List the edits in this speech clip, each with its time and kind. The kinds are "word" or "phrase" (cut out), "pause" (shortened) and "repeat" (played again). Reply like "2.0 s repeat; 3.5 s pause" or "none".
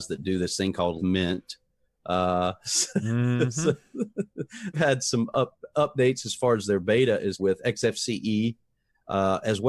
1.0 s word; 4.7 s word; 7.4 s word